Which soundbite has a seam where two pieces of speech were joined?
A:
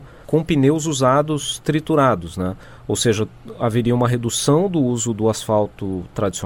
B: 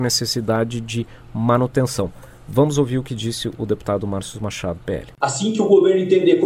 B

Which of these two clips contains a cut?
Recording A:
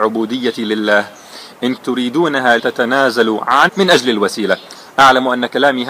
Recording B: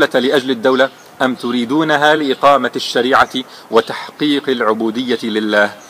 A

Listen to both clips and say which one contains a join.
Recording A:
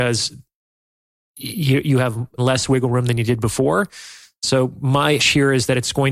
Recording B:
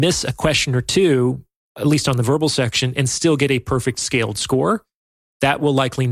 A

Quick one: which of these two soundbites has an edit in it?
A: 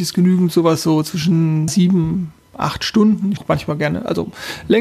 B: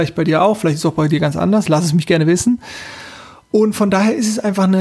A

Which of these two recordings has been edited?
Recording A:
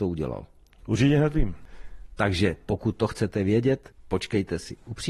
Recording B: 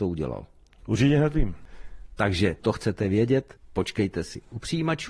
B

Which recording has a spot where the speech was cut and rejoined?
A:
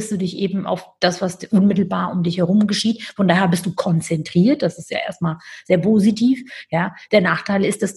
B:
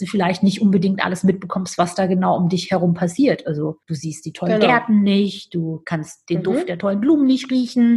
B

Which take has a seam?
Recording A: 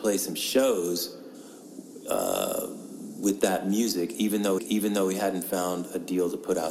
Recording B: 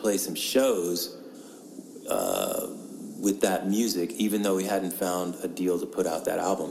A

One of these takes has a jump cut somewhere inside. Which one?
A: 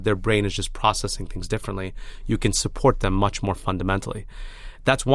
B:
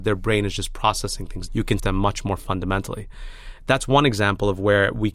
B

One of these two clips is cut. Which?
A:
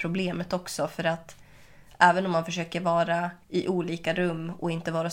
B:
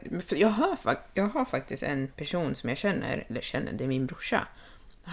A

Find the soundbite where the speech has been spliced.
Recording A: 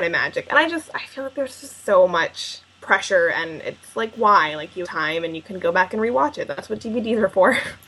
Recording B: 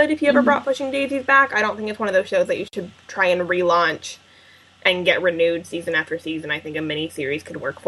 A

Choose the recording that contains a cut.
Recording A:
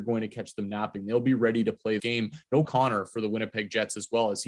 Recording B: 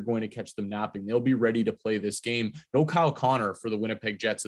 A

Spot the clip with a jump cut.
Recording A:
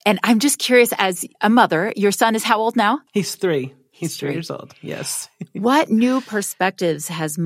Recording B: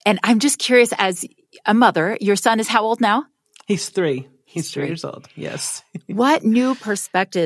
A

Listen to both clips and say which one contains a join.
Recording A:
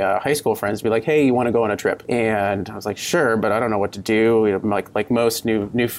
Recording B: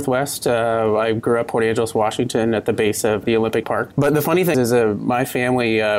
B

